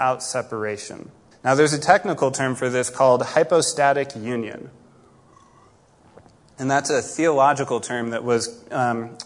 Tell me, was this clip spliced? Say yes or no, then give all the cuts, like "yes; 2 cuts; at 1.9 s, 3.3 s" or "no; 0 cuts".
yes; 1 cut; at 1.3 s